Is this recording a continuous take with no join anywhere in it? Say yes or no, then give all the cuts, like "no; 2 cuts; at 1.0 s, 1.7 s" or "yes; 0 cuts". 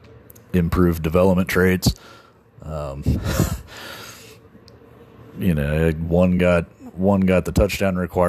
yes; 0 cuts